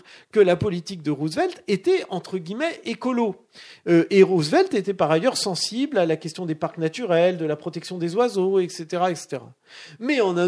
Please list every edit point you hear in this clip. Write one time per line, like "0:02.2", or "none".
none